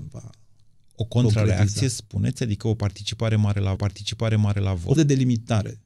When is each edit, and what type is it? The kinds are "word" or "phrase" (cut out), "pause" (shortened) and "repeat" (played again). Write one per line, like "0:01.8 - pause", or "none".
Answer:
0:03.8 - repeat
0:05.0 - word